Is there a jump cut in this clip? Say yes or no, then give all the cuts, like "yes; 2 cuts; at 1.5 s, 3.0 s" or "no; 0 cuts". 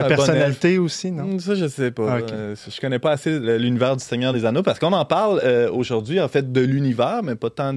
no; 0 cuts